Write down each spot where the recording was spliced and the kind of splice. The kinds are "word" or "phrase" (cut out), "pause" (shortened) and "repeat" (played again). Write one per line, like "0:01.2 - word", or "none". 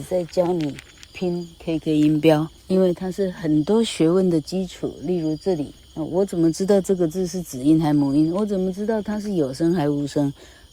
0:02.6 - pause
0:05.8 - pause